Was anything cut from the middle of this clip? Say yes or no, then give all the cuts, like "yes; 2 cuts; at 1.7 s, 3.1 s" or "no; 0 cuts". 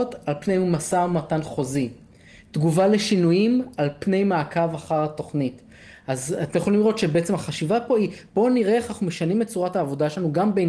no; 0 cuts